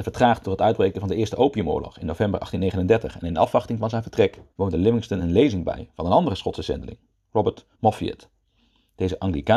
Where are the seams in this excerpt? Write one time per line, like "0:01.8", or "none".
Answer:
0:04.5
0:07.7

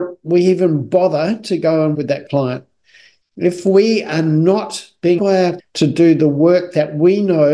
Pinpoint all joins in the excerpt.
0:01.9
0:03.2
0:05.2
0:05.6

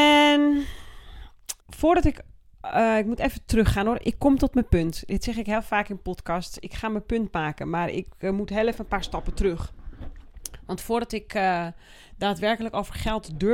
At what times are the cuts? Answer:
0:01.6

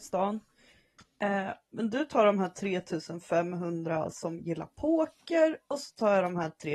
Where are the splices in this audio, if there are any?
none

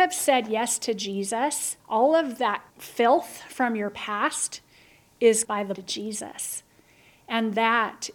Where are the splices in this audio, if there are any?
0:01.8
0:02.7
0:05.4
0:05.8

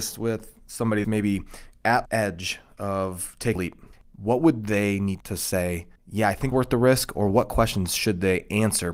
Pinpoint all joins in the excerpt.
0:01.0
0:02.0
0:03.6
0:05.2
0:06.0
0:06.5

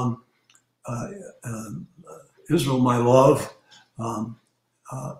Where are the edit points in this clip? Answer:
none

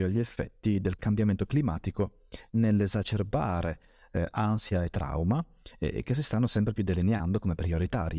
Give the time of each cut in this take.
none

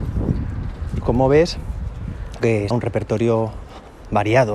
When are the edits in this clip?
0:01.0
0:02.4
0:02.7

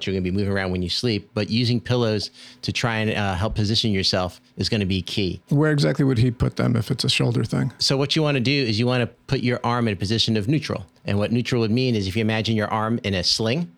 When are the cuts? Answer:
none

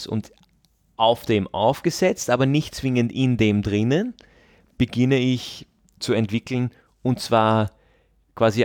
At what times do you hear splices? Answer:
0:06.0

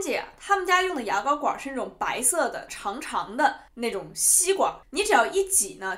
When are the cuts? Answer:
0:02.7
0:03.7
0:04.8

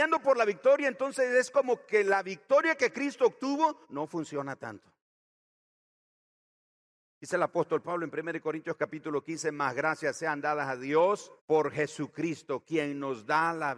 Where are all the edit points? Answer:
0:03.8
0:11.4

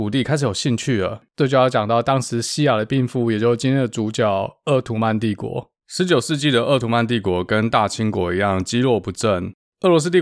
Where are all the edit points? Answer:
0:05.8

